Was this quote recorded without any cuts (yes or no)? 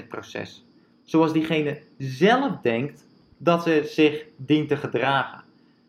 yes